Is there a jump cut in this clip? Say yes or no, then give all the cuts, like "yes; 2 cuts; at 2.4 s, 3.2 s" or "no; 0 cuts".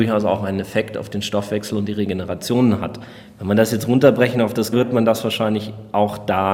yes; 1 cut; at 4.7 s